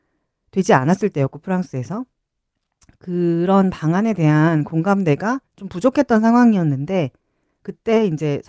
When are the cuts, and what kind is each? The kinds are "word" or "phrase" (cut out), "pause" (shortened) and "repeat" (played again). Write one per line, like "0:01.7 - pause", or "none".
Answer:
0:05.5 - pause